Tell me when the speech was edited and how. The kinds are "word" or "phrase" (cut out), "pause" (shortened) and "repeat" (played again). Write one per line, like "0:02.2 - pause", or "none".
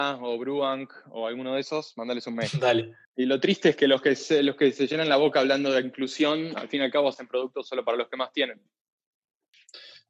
0:03.0 - pause